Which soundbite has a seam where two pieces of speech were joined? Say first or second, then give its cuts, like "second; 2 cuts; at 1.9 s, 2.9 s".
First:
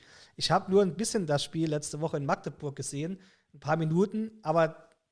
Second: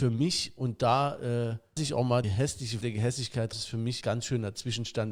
second; 5 cuts; at 1.8 s, 2.2 s, 2.8 s, 3.5 s, 4.0 s